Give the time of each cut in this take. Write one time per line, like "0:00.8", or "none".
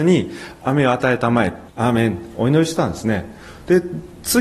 0:01.7

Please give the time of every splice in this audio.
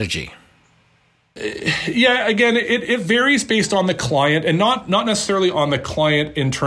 none

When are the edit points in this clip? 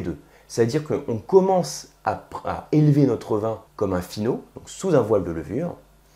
0:03.7

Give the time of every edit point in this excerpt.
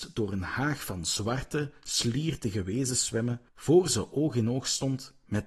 0:03.5

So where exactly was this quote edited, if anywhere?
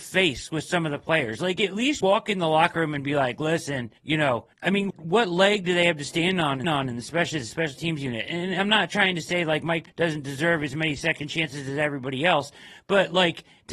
0:02.0
0:04.0
0:04.5
0:04.9
0:06.6
0:09.9

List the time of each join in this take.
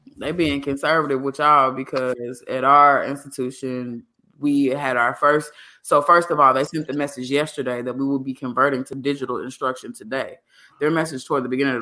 none

